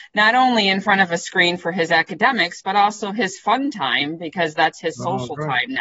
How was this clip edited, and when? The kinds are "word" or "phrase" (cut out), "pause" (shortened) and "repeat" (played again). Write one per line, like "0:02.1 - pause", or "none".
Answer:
none